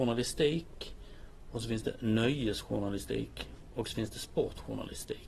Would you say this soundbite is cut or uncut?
uncut